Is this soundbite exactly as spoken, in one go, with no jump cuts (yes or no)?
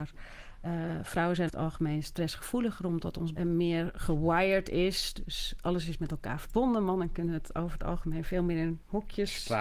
no